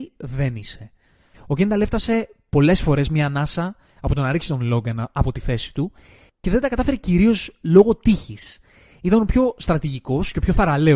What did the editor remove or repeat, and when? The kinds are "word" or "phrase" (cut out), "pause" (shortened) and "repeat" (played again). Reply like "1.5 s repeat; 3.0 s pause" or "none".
none